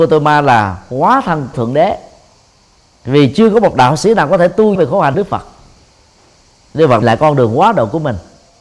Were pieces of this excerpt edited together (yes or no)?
yes